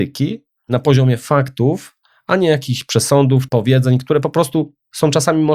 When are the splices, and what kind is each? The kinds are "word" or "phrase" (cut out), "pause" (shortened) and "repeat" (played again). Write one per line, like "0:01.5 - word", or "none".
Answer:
0:03.5 - word